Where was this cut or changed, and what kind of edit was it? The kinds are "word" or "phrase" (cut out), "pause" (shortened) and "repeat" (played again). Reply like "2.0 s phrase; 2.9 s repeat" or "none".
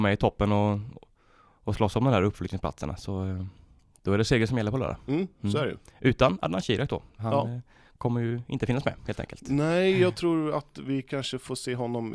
none